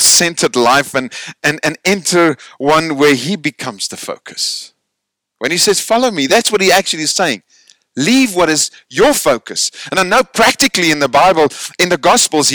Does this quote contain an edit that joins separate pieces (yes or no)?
no